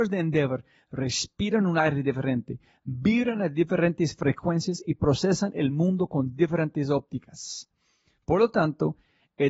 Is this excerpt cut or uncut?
uncut